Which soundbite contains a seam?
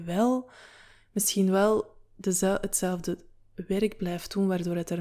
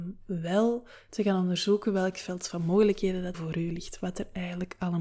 second; 1 cut; at 3.3 s

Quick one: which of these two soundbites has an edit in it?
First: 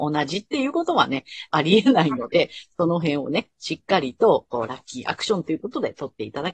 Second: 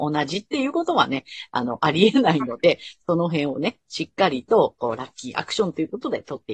first; 1 cut; at 1.5 s

